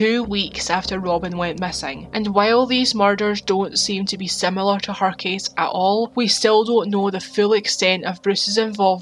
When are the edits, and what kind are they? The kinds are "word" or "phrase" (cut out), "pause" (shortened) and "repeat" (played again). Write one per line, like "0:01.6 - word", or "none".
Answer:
none